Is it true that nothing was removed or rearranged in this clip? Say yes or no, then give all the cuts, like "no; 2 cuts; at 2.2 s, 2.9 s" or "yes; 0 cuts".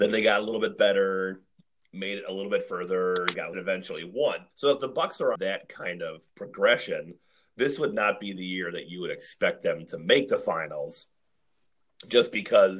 no; 3 cuts; at 3.5 s, 4.5 s, 5.4 s